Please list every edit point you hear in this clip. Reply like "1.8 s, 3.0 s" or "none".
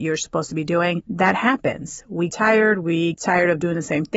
2.3 s, 3.1 s